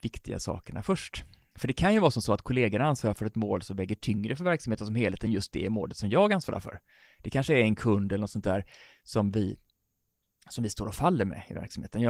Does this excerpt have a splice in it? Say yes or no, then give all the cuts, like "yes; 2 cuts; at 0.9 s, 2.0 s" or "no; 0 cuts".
no; 0 cuts